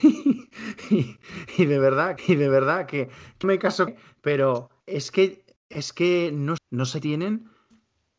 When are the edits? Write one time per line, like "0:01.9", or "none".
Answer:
0:02.2
0:03.4
0:03.9
0:04.8
0:05.6
0:06.6
0:07.0